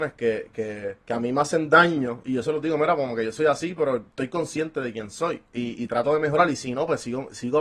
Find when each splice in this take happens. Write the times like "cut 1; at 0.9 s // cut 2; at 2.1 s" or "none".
cut 1; at 1.0 s // cut 2; at 4.1 s // cut 3; at 5.5 s

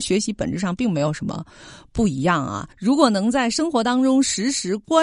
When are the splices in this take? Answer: cut 1; at 2.7 s

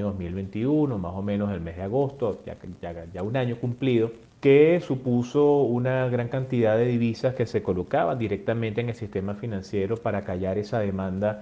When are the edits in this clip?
none

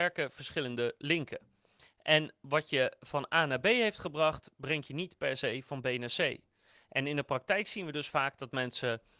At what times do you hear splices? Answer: none

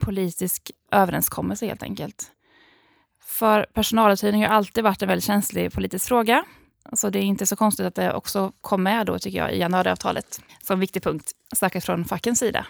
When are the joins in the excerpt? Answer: none

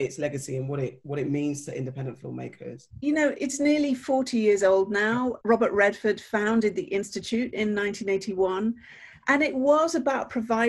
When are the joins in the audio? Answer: cut 1; at 2.9 s // cut 2; at 5.4 s

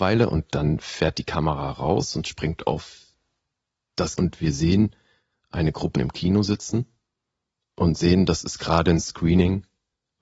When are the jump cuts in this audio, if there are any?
cut 1; at 4.2 s // cut 2; at 5.9 s

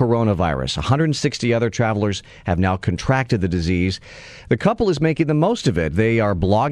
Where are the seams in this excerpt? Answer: none

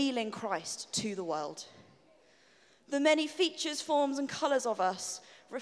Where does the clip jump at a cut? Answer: none

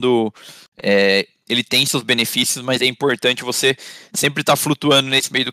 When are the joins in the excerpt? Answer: none

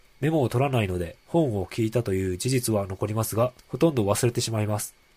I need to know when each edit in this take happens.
cut 1; at 1.2 s // cut 2; at 3.6 s

